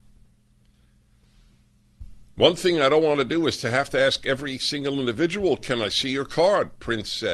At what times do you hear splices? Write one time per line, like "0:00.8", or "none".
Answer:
none